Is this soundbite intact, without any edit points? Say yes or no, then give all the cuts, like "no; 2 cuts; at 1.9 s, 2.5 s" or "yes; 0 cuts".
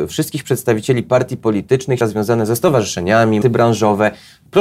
no; 2 cuts; at 2.0 s, 3.4 s